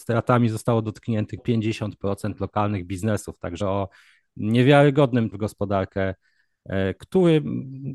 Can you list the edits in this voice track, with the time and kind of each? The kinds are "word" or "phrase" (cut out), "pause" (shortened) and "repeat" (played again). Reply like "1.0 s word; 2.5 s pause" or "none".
1.4 s word; 3.6 s word; 5.3 s word; 7.0 s word

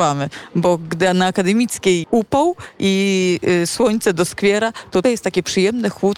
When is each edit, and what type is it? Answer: 2.0 s word; 5.0 s word

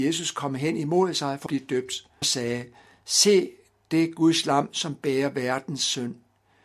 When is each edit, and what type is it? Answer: 1.5 s word; 2.2 s word

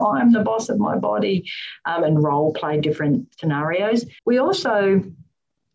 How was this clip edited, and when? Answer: 4.2 s pause

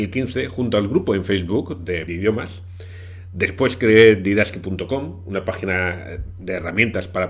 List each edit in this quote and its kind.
2.1 s phrase

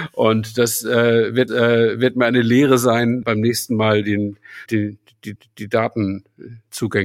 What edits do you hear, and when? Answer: 1.5 s repeat; 3.2 s word; 4.7 s word; 5.4 s repeat

